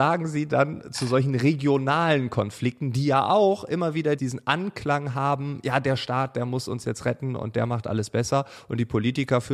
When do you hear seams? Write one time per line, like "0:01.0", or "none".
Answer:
0:04.2